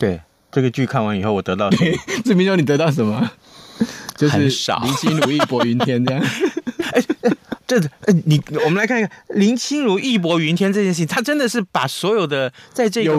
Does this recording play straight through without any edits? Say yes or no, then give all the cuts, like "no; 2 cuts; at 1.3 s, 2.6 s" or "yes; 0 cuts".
no; 1 cut; at 7.6 s